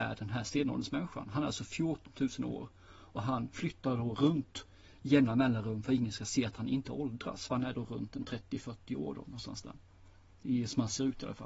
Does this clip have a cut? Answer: no; 0 cuts

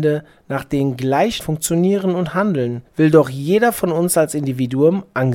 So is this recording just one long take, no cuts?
no; 2 cuts; at 1.4 s, 2.9 s

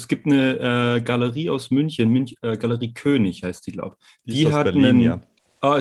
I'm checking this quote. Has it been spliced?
no; 0 cuts

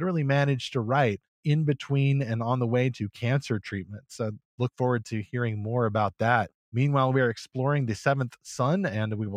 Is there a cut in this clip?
yes; 2 cuts; at 1.4 s, 6.6 s

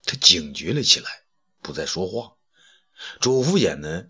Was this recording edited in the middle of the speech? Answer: no; 0 cuts

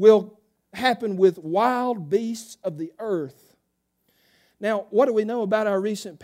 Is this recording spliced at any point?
no; 0 cuts

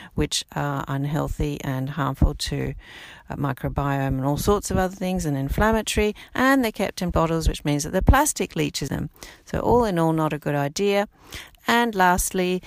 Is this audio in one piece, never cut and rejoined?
no; 2 cuts; at 7.1 s, 8.9 s

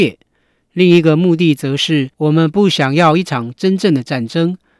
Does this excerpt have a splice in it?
yes; 1 cut; at 2.1 s

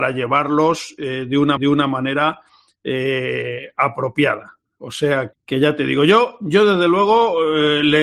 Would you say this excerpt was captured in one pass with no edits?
no; 2 cuts; at 1.6 s, 5.3 s

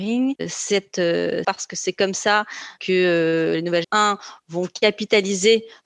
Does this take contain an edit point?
yes; 2 cuts; at 1.4 s, 3.8 s

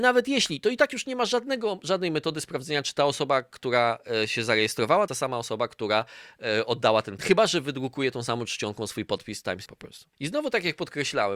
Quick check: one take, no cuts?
no; 4 cuts; at 5.1 s, 7.2 s, 9.7 s, 10.1 s

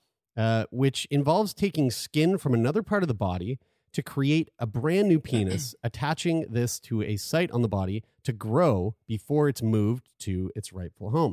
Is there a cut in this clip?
no; 0 cuts

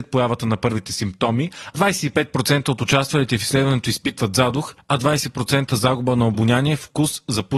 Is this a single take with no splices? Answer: yes; 0 cuts

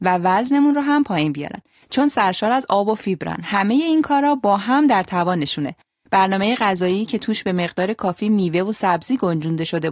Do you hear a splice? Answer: no; 0 cuts

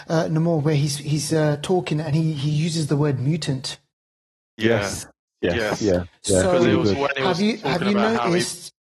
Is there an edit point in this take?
no; 0 cuts

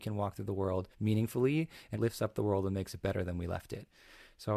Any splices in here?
yes; 2 cuts; at 0.9 s, 1.9 s

